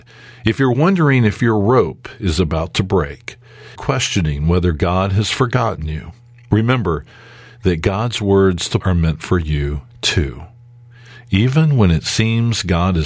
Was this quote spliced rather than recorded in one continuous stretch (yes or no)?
yes